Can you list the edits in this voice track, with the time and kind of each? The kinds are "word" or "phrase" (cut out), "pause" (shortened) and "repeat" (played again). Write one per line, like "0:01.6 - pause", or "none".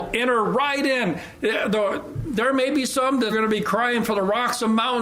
0:03.3 - word

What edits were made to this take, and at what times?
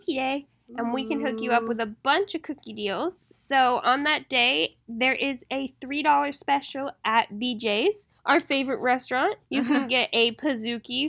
0:08.2 - pause
0:09.5 - pause

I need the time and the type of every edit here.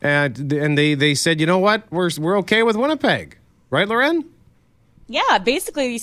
none

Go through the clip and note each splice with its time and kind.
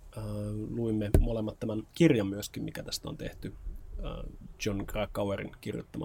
0:01.9 - pause

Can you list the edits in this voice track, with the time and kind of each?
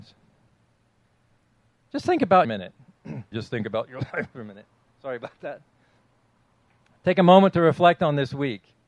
0:02.4 - phrase
0:03.3 - word

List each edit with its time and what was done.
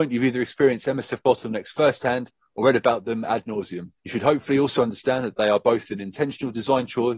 0:04.0 - pause

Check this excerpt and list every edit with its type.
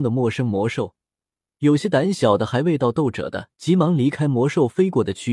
0:03.5 - pause

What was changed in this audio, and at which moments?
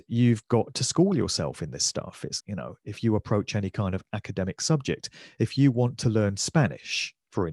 0:02.4 - word

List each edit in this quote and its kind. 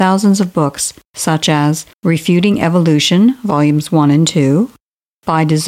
0:01.9 - pause

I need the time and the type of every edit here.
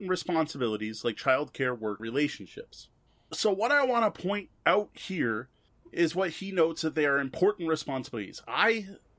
0:02.0 - word
0:04.6 - pause

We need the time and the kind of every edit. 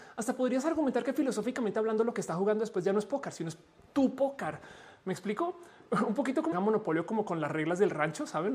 0:06.5 - phrase

